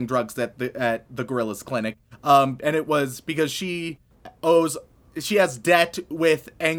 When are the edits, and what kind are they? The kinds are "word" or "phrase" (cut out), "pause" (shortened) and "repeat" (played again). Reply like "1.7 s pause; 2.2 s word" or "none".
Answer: none